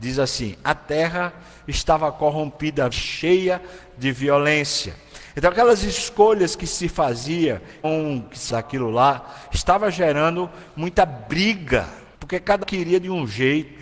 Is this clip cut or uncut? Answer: cut